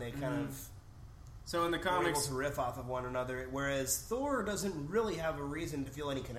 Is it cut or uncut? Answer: uncut